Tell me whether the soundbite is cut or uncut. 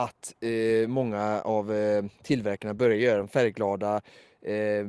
uncut